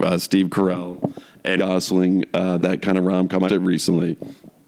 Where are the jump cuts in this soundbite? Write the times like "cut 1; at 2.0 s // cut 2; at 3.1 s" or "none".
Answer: cut 1; at 1.6 s // cut 2; at 2.6 s // cut 3; at 3.5 s